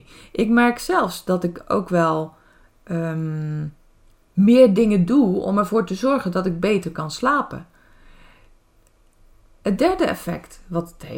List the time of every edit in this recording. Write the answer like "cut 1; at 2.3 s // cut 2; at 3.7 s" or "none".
none